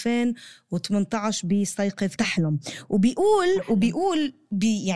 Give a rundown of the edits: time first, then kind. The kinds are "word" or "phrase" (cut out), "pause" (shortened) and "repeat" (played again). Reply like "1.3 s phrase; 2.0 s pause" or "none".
2.2 s phrase

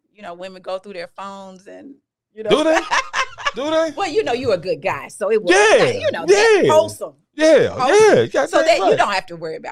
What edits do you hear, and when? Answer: none

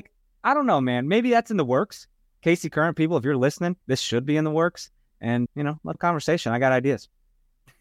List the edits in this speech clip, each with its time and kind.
3.8 s pause; 5.5 s word; 5.9 s word

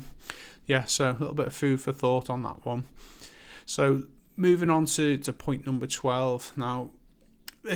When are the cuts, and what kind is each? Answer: none

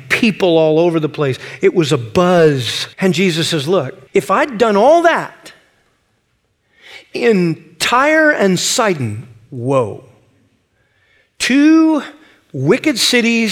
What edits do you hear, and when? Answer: 2.9 s pause; 4.1 s pause

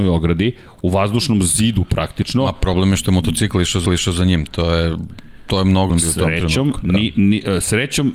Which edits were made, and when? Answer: 3.9 s repeat; 5.9 s phrase

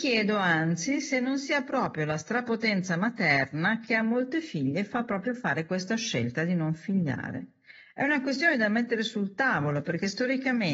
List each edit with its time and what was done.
none

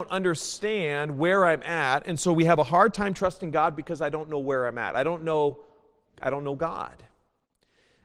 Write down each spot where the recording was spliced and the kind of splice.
none

